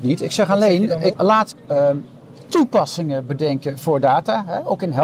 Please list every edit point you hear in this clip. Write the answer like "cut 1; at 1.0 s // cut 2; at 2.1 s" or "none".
cut 1; at 1.1 s // cut 2; at 1.5 s